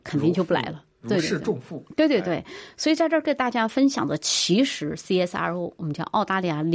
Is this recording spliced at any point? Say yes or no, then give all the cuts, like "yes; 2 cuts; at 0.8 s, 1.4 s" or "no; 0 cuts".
no; 0 cuts